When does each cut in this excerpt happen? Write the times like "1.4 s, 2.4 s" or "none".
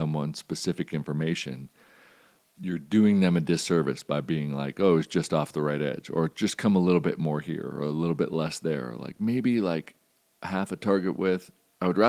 none